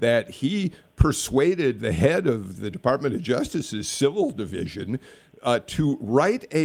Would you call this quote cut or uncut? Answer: uncut